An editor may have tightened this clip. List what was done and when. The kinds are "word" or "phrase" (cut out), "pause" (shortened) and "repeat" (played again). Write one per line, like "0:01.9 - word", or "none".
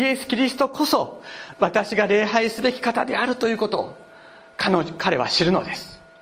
none